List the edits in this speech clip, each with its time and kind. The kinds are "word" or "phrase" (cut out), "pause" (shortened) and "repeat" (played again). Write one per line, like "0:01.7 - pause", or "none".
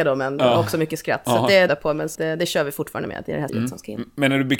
0:01.7 - phrase
0:02.1 - word
0:03.5 - phrase